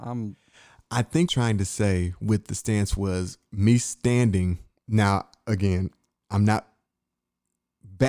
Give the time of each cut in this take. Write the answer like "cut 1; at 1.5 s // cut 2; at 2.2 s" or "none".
cut 1; at 1.3 s